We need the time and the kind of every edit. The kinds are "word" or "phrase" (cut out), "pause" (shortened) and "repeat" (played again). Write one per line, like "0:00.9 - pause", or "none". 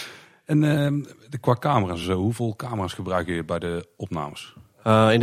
none